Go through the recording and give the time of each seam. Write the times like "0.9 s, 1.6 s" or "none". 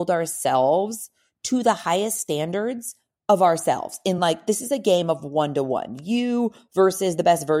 none

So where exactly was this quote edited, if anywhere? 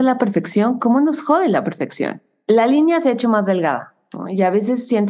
none

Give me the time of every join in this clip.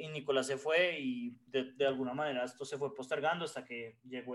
1.5 s

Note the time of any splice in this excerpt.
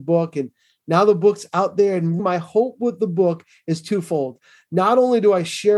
2.2 s

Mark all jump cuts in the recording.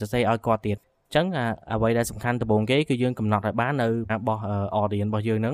4.1 s

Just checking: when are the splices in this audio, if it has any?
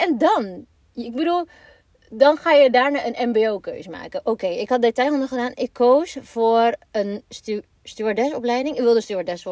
none

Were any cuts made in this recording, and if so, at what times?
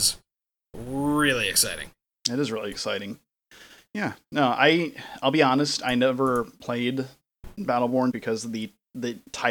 8.1 s

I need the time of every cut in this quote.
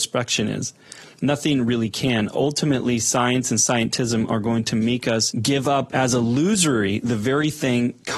none

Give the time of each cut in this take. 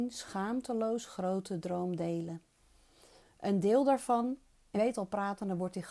4.7 s

